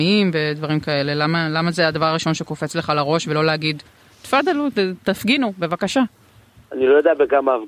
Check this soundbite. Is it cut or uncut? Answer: uncut